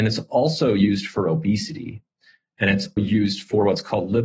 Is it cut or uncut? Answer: cut